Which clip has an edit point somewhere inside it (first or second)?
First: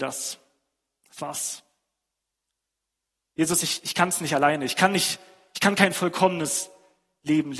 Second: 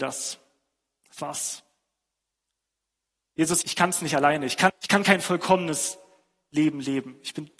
second